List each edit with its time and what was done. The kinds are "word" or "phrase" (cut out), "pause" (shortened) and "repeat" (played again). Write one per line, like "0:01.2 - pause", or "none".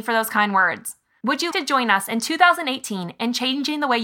0:01.5 - word